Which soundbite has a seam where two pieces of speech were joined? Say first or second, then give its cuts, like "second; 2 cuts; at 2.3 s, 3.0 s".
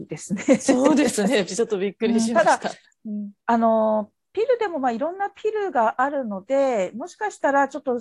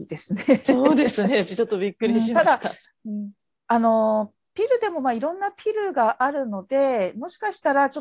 first; 1 cut; at 3.4 s